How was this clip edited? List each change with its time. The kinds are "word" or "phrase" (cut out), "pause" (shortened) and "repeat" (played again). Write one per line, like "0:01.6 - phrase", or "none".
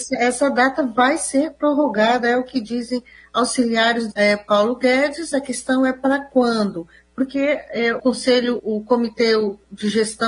0:04.1 - word
0:08.0 - word
0:08.6 - word